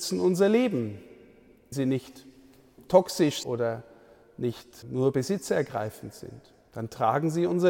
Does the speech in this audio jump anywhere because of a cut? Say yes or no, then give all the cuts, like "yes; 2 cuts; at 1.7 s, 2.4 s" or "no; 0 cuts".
yes; 3 cuts; at 1.7 s, 3.4 s, 4.8 s